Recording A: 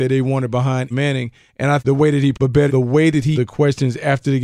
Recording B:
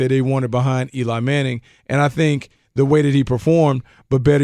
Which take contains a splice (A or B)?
A